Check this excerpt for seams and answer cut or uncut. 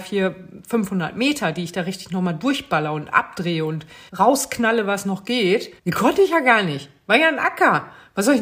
cut